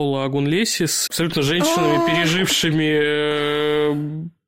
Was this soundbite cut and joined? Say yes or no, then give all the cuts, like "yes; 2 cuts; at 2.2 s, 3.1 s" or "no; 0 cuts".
yes; 1 cut; at 1.1 s